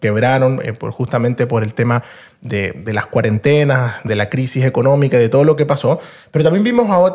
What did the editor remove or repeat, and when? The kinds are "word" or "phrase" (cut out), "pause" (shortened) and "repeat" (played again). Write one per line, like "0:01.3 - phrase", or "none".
none